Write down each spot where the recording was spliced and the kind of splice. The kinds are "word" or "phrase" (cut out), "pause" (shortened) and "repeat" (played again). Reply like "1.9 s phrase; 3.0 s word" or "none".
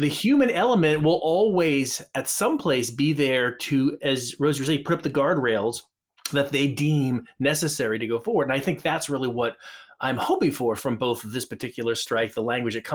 none